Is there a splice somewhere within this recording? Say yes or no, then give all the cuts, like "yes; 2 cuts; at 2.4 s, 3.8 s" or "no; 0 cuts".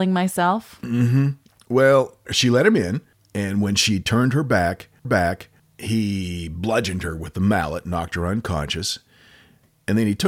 yes; 1 cut; at 5.0 s